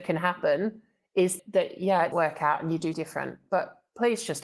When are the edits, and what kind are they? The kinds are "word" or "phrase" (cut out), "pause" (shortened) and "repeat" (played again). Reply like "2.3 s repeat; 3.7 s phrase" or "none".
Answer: 1.4 s word; 2.1 s word; 2.9 s word